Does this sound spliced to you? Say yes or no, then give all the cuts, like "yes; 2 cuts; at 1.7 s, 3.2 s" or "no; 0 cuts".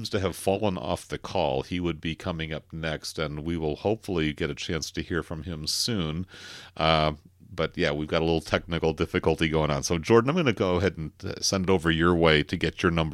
no; 0 cuts